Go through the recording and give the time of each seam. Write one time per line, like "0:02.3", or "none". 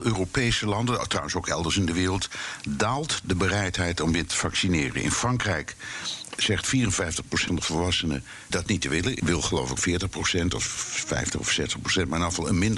0:04.3
0:06.4
0:07.5
0:08.5
0:09.2
0:09.8